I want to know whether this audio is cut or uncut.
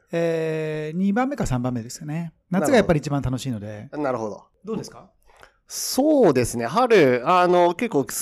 cut